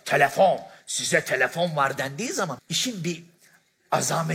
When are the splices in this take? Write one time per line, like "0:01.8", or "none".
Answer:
0:02.6